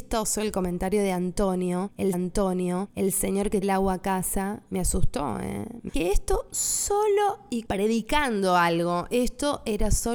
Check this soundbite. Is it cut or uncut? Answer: cut